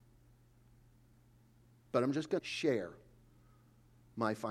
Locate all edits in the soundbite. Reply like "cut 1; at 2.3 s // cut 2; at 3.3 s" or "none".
cut 1; at 2.4 s